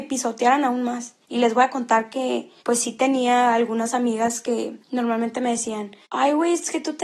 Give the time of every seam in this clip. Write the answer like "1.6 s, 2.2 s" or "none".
1.2 s, 2.6 s, 4.8 s, 6.0 s